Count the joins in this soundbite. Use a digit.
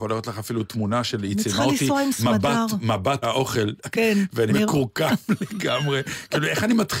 2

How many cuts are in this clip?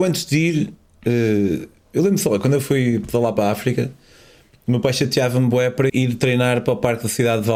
1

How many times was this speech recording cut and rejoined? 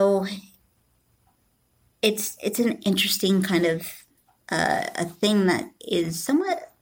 0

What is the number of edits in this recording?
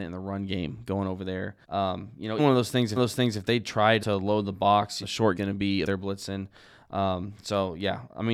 7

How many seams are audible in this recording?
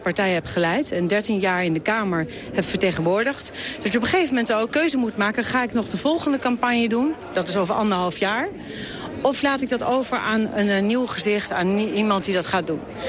1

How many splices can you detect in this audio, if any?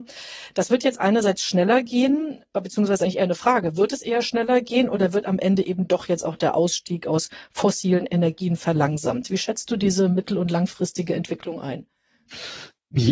0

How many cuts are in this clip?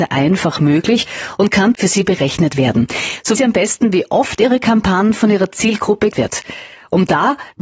3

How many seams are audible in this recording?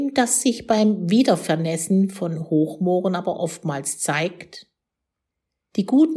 0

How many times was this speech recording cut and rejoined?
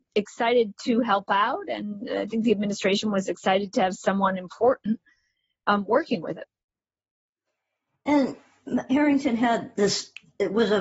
0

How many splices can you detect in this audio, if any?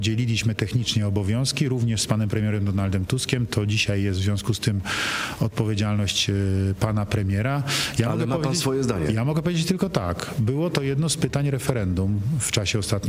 0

